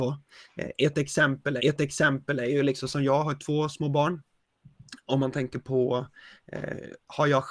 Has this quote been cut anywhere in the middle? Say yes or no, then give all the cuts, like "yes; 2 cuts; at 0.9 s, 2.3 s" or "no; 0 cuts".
yes; 1 cut; at 1.6 s